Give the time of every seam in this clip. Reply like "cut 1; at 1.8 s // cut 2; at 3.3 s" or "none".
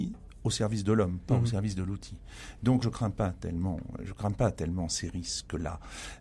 cut 1; at 2.8 s